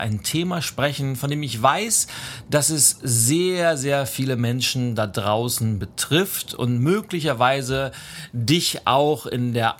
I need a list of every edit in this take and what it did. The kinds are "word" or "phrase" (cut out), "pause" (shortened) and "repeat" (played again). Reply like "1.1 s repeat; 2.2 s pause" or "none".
none